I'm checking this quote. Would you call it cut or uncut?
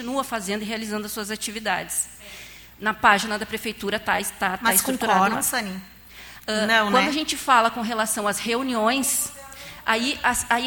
uncut